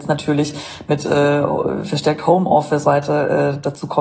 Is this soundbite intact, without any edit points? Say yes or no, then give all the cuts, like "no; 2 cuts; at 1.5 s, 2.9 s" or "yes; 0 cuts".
no; 1 cut; at 2.8 s